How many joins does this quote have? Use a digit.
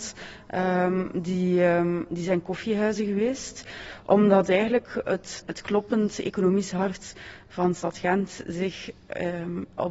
1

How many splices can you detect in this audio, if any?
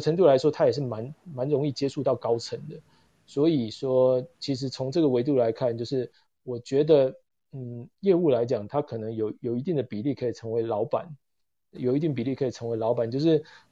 0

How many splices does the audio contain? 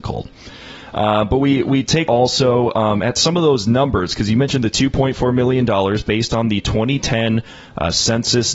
1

